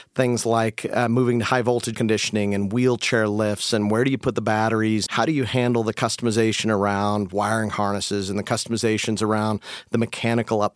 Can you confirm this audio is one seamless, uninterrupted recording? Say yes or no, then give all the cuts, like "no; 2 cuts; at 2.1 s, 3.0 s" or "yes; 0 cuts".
no; 2 cuts; at 1.9 s, 5.1 s